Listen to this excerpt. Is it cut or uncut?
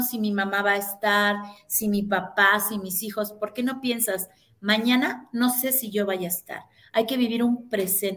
uncut